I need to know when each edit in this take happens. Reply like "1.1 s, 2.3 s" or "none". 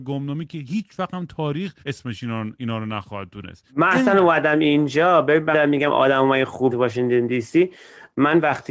1.8 s, 3.7 s, 5.5 s, 6.7 s